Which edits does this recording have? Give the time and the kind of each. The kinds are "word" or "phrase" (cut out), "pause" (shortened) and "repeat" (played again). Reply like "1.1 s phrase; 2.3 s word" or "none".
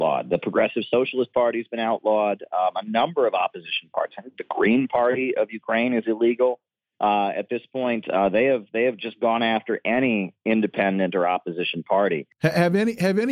none